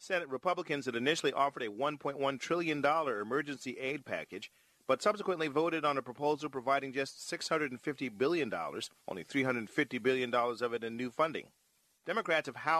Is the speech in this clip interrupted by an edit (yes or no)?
no